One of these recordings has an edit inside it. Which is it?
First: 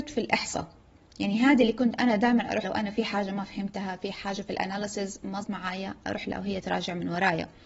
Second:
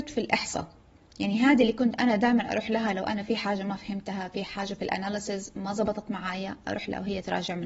first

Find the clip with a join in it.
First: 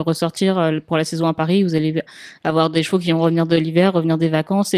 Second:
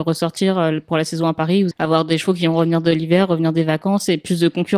second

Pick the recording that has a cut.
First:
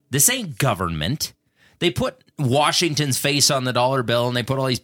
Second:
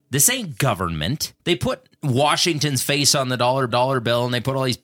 second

